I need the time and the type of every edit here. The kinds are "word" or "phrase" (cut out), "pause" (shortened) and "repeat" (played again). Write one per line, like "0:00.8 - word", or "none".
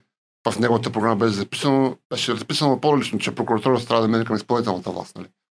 0:02.0 - pause